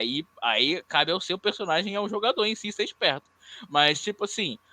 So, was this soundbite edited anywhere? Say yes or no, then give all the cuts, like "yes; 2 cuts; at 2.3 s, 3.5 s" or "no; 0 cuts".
no; 0 cuts